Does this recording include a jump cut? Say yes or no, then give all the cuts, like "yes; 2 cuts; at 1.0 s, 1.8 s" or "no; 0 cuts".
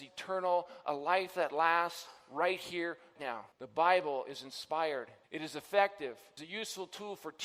yes; 4 cuts; at 3.2 s, 3.5 s, 5.2 s, 6.4 s